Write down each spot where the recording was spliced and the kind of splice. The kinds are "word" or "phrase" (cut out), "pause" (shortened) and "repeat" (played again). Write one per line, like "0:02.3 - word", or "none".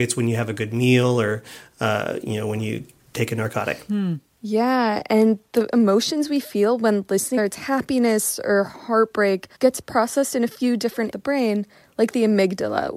0:07.4 - phrase
0:09.5 - pause
0:11.1 - phrase